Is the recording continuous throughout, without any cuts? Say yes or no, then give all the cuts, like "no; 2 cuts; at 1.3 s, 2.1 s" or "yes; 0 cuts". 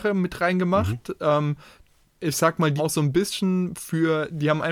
no; 2 cuts; at 2.0 s, 2.8 s